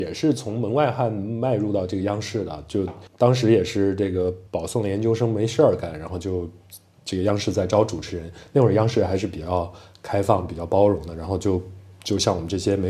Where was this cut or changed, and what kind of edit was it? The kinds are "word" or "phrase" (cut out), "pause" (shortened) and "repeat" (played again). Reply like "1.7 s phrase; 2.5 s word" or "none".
3.1 s pause; 4.5 s pause